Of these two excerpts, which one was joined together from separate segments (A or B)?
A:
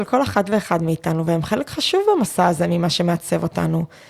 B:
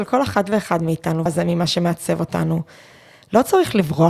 B